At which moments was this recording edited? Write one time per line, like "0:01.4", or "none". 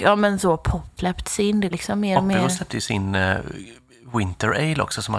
0:01.0
0:01.7

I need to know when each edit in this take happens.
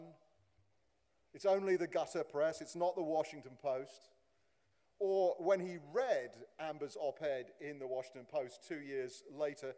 none

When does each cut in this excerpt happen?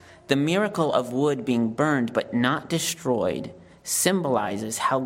none

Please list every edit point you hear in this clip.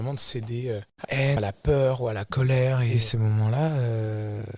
0:01.0
0:01.4
0:03.1

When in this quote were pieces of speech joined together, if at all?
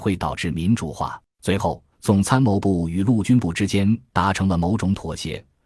0:01.3
0:01.9

